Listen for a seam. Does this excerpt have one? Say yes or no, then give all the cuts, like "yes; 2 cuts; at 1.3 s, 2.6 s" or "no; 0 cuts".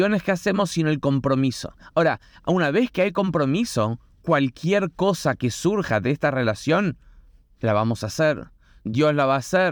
no; 0 cuts